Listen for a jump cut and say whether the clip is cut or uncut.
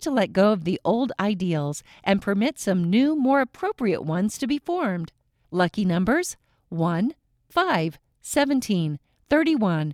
uncut